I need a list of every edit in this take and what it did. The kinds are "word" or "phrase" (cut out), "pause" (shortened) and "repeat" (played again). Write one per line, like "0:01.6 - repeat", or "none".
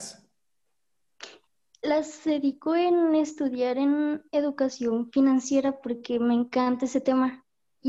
none